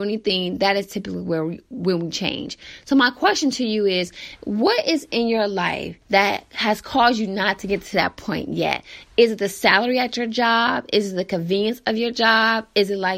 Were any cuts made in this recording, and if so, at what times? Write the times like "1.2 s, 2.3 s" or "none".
6.0 s